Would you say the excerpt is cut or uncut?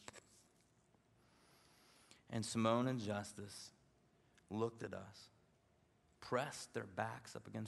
uncut